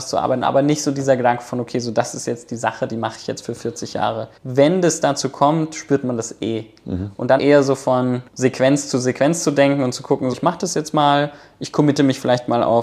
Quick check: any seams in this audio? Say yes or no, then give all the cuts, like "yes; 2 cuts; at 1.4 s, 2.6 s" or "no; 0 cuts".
yes; 4 cuts; at 4.4 s, 7.4 s, 8.3 s, 10.3 s